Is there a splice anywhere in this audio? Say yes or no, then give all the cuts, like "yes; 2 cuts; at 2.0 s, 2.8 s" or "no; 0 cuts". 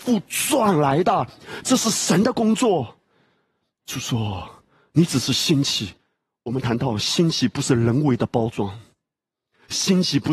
no; 0 cuts